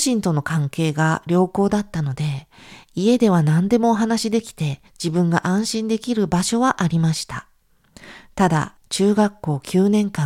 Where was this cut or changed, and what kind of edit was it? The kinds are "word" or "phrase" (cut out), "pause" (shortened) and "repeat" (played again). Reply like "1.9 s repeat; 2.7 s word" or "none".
4.9 s pause; 8.8 s phrase